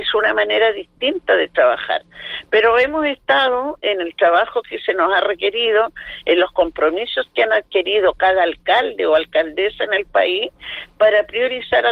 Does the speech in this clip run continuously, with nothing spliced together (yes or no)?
yes